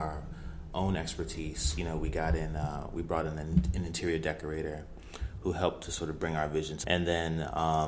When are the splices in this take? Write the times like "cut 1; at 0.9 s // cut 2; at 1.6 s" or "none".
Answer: cut 1; at 6.8 s